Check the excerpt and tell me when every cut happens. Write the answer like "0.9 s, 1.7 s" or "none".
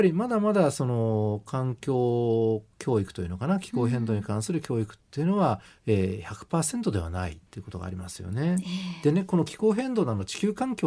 5.7 s, 7.5 s